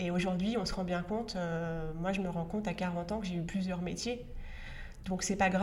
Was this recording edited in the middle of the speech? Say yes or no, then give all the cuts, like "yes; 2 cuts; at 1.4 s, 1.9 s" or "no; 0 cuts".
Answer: no; 0 cuts